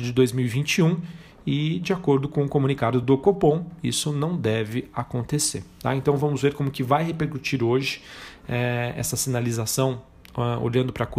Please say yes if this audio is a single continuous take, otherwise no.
yes